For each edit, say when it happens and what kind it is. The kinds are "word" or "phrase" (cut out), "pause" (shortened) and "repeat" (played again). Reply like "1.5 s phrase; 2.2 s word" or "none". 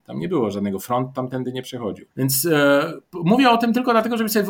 2.1 s pause

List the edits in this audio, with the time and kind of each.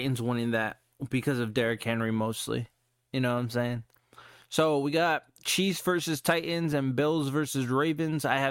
none

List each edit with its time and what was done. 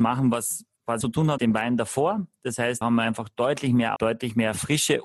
1.0 s word; 1.4 s word; 2.8 s word; 4.0 s word

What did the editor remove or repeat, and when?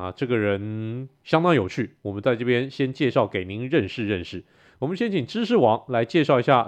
none

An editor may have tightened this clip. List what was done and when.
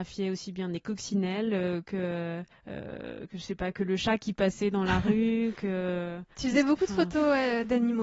2.5 s pause; 6.3 s pause

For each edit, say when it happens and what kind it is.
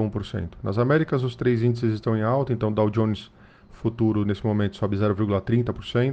none

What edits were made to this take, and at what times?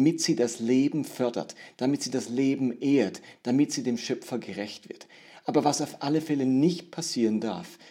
none

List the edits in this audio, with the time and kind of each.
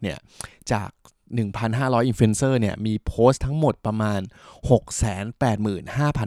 none

